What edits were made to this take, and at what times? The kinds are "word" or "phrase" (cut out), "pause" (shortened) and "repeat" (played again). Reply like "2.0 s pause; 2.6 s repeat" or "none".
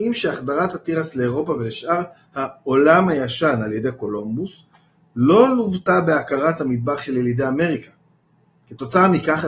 none